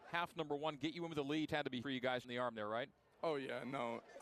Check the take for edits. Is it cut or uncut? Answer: cut